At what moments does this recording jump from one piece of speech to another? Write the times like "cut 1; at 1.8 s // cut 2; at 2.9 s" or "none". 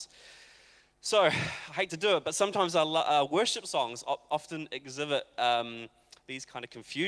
none